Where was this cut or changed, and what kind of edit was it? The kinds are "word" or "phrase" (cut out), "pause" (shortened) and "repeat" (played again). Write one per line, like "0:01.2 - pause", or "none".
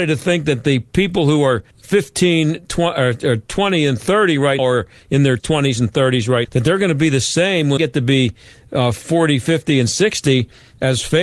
0:01.7 - pause
0:04.6 - word
0:05.4 - word
0:06.4 - word
0:07.8 - word